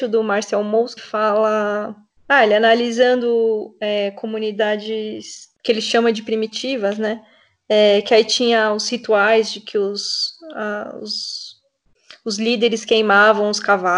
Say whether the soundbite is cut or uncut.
cut